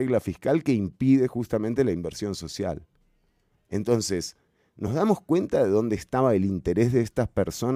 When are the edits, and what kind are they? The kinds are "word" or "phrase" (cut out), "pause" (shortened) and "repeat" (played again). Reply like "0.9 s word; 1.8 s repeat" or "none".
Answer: none